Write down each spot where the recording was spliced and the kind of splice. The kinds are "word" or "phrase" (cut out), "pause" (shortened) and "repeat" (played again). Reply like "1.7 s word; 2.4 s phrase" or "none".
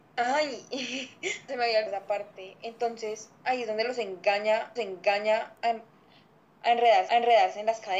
1.5 s word; 1.9 s word; 4.8 s repeat; 7.1 s repeat